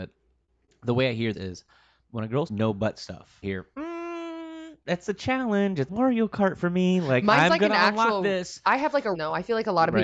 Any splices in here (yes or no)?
yes